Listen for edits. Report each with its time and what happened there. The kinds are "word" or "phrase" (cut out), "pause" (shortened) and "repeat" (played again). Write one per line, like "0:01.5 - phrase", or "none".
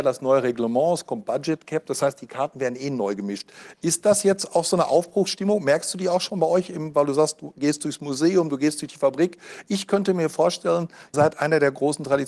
0:11.1 - word